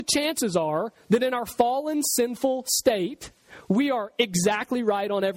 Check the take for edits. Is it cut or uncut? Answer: uncut